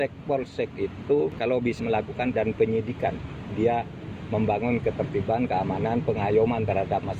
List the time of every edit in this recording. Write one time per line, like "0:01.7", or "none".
0:01.8
0:02.3
0:03.5
0:04.8